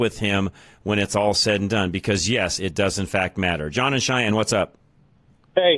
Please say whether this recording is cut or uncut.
uncut